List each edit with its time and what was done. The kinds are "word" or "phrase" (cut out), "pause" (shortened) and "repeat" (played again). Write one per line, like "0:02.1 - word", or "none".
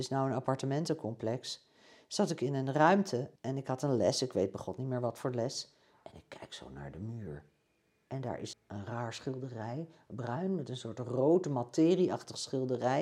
0:03.4 - pause
0:08.5 - word